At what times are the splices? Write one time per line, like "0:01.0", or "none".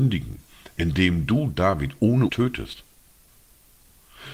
0:02.3